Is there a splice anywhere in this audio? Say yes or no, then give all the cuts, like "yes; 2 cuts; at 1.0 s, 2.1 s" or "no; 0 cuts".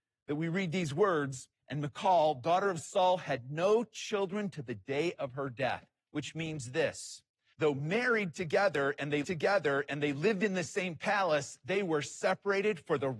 yes; 3 cuts; at 1.5 s, 7.5 s, 9.2 s